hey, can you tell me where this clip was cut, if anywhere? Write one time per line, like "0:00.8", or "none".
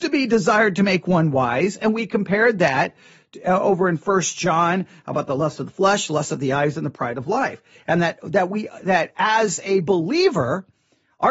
none